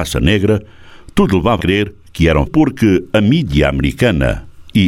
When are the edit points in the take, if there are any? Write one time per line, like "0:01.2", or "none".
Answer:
0:01.6
0:02.5